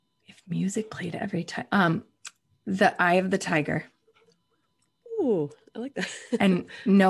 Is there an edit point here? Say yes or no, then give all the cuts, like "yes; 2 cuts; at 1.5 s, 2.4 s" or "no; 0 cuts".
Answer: no; 0 cuts